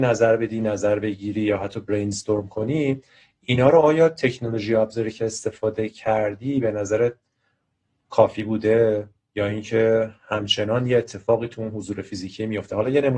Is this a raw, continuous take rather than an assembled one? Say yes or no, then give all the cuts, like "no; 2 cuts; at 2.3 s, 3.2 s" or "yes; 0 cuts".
yes; 0 cuts